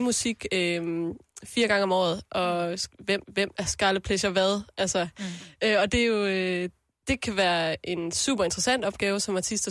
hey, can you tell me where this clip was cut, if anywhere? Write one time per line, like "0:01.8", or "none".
0:03.2